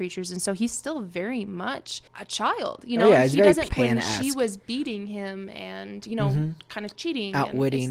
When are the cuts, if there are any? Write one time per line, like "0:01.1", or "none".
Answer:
0:02.1
0:03.7